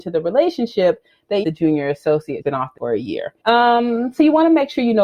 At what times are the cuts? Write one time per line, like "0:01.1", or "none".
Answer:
0:01.4
0:02.4
0:02.8
0:03.4